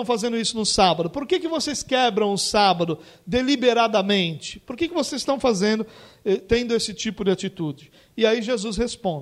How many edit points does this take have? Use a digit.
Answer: 0